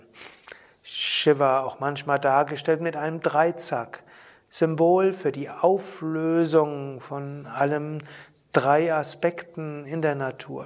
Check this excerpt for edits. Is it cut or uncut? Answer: uncut